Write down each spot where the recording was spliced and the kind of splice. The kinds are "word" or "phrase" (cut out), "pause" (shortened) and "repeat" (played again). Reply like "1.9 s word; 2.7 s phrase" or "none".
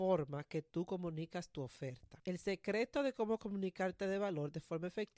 4.0 s word